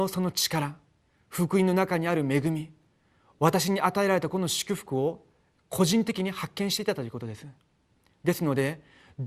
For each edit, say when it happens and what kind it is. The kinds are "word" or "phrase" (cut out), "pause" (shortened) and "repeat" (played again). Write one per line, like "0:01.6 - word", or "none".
none